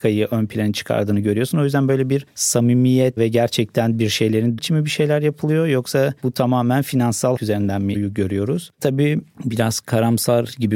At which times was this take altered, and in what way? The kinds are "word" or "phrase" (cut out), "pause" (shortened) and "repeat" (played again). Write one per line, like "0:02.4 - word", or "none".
0:03.2 - word
0:04.6 - word
0:07.4 - word
0:07.9 - word
0:08.7 - pause